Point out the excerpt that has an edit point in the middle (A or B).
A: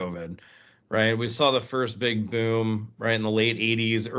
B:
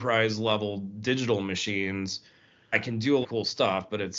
B